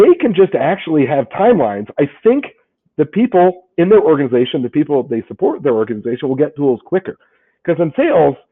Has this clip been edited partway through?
no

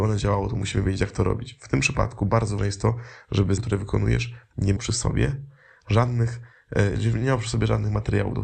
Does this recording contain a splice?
yes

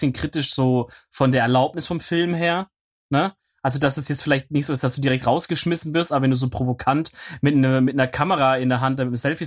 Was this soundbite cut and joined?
no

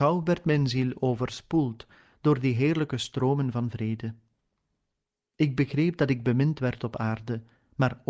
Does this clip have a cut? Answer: no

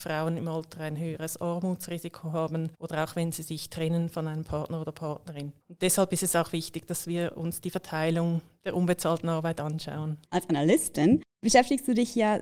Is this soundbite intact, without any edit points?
no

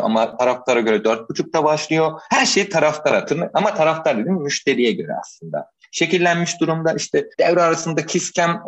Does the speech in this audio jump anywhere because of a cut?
yes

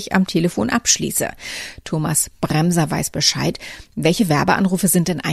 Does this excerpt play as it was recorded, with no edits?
yes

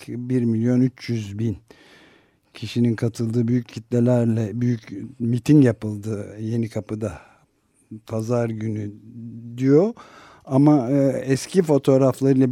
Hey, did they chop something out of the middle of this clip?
no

